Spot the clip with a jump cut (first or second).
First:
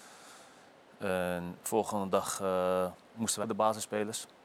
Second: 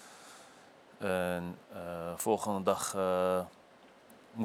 first